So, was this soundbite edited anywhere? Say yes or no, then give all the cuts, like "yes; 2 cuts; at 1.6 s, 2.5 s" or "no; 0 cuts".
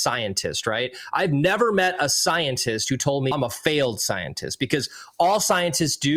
yes; 1 cut; at 3.3 s